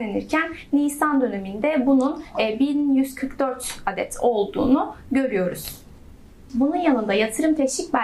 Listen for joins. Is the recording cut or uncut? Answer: uncut